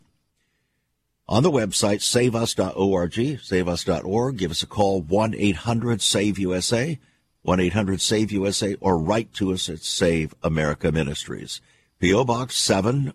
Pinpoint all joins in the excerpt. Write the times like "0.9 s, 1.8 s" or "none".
none